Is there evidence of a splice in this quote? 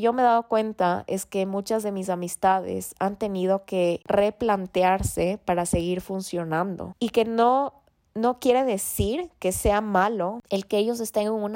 no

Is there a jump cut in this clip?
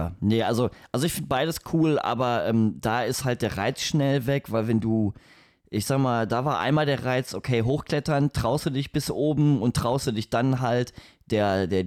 no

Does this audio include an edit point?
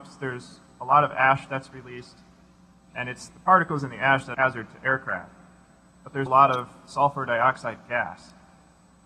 yes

